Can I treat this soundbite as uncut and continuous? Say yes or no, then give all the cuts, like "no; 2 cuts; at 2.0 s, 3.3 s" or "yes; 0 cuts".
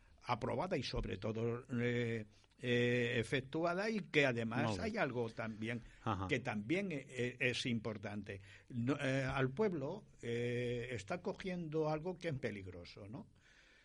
no; 1 cut; at 12.4 s